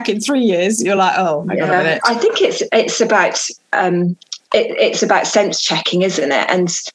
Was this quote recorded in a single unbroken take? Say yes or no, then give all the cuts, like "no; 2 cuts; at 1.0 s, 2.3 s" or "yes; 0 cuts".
yes; 0 cuts